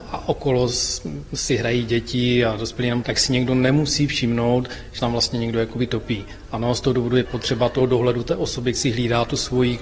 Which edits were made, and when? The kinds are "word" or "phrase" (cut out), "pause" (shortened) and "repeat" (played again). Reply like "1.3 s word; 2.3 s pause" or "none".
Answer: 3.0 s word; 5.0 s word; 7.2 s word; 8.8 s word